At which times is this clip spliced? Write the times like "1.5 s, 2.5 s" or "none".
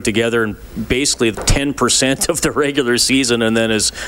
1.3 s